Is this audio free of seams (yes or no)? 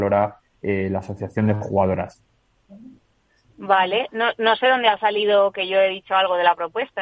no